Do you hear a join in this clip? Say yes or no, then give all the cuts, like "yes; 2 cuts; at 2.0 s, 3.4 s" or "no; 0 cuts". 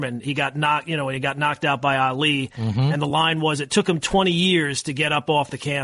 no; 0 cuts